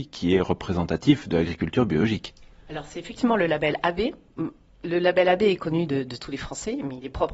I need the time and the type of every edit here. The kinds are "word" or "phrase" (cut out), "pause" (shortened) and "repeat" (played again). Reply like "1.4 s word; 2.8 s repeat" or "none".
none